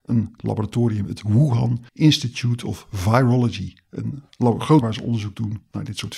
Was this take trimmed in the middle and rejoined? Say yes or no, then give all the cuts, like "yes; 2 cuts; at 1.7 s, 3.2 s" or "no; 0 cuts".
yes; 2 cuts; at 1.9 s, 4.8 s